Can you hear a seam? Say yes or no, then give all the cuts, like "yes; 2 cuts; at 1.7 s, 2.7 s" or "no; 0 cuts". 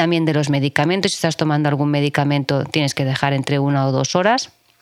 no; 0 cuts